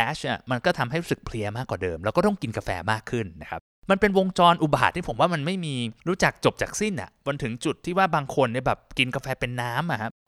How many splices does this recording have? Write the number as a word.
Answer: one